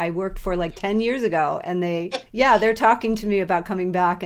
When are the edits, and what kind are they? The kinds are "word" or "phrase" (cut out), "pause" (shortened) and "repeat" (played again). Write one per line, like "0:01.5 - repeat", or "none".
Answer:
0:02.3 - word

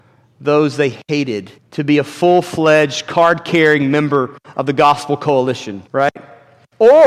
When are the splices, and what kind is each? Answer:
0:01.6 - pause
0:05.9 - pause

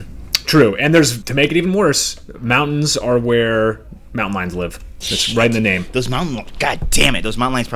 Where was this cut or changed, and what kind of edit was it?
0:01.2 - word

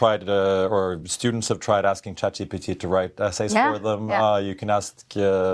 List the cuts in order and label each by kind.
none

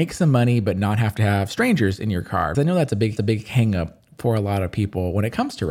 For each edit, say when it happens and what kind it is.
0:02.5 - word
0:03.2 - repeat

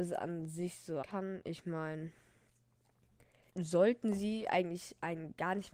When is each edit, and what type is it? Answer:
0:01.0 - word
0:03.5 - word

